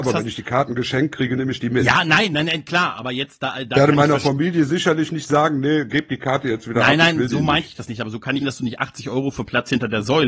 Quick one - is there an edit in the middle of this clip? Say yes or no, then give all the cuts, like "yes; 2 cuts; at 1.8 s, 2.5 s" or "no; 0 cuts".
yes; 1 cut; at 8.4 s